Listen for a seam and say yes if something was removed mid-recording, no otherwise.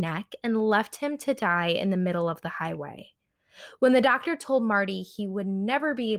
no